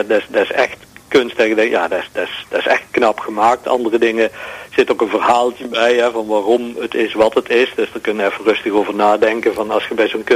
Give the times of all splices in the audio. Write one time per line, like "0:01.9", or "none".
none